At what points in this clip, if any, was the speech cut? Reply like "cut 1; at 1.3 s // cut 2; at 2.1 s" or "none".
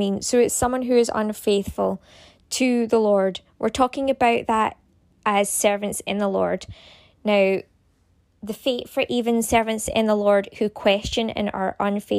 none